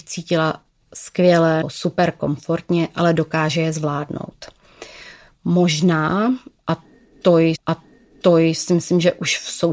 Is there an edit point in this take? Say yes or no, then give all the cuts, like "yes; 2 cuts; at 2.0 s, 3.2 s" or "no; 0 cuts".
yes; 2 cuts; at 1.6 s, 7.6 s